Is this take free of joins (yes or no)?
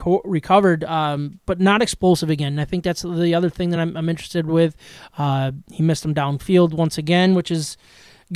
yes